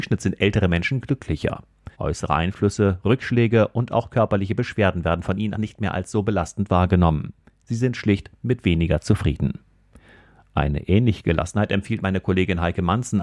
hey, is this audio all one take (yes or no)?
no